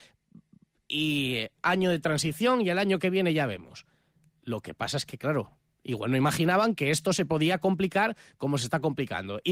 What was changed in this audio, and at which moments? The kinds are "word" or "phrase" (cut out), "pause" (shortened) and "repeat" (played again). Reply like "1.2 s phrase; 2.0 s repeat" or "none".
5.7 s pause

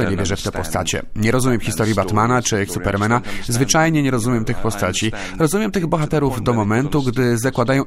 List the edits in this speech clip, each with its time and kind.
2.7 s word

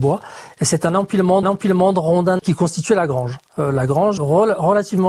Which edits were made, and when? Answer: 1.4 s repeat; 2.4 s phrase; 3.5 s pause; 4.2 s word

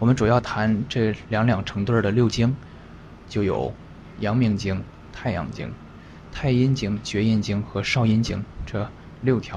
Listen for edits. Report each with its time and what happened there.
5.1 s phrase

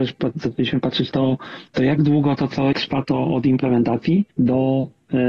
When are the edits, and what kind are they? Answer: 1.1 s word; 1.7 s pause; 2.7 s word; 4.3 s pause

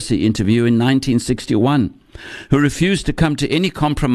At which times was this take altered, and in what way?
none

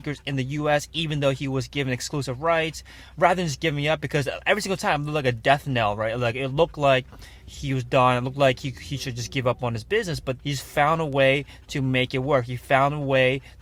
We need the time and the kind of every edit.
10.4 s word

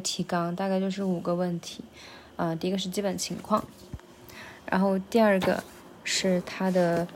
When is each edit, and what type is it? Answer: none

